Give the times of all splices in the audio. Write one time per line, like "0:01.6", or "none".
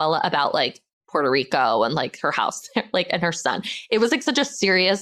none